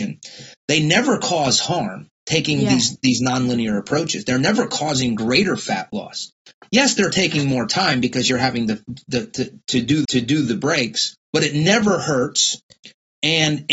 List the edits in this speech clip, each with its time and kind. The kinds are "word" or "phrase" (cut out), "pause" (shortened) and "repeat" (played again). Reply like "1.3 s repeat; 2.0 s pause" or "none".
10.0 s repeat; 11.2 s pause